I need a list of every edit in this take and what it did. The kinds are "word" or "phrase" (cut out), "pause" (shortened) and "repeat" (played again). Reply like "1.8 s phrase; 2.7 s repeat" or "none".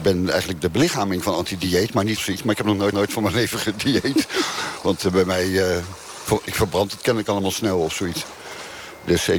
2.2 s phrase; 2.9 s repeat